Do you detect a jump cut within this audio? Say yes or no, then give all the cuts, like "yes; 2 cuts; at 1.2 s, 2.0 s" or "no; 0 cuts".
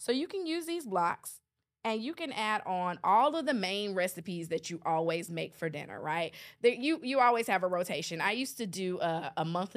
no; 0 cuts